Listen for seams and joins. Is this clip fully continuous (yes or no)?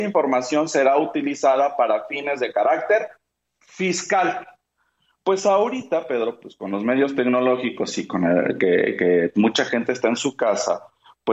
yes